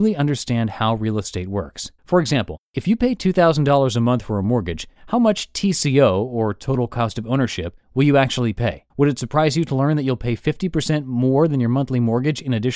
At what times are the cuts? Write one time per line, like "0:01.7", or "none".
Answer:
0:02.0
0:02.6
0:05.0
0:07.8
0:08.9

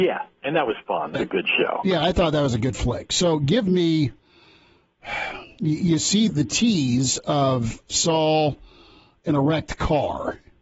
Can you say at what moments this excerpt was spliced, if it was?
0:01.1
0:06.3

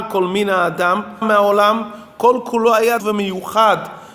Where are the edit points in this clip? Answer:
0:01.2
0:03.0

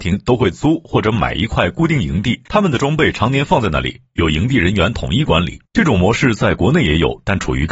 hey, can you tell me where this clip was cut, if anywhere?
0:02.5
0:05.7

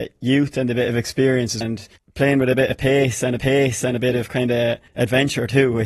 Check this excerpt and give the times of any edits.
0:01.6
0:02.0
0:03.4
0:04.9

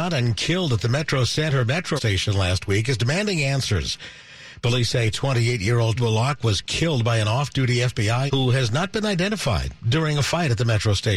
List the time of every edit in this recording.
0:02.0
0:06.0
0:08.3

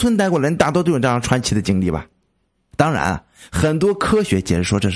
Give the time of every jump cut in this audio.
none

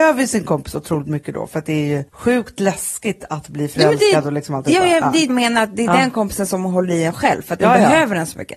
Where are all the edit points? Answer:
0:02.1
0:05.3

